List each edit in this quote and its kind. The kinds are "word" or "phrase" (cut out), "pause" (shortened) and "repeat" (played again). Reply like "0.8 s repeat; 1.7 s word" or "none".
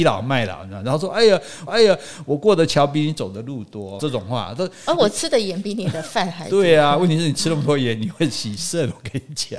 1.7 s repeat; 4.0 s phrase